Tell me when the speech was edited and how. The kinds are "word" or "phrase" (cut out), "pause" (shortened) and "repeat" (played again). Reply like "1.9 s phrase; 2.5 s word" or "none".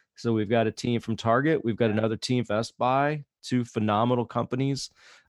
2.5 s word

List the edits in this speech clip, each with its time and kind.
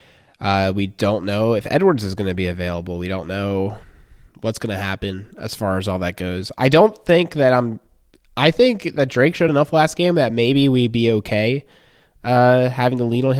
none

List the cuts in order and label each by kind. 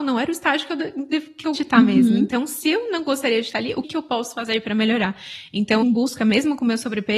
1.5 s word; 3.8 s word; 5.8 s phrase

